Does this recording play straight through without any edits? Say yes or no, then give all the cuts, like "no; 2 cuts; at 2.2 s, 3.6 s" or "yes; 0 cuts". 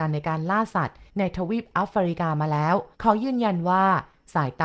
no; 2 cuts; at 1.1 s, 2.9 s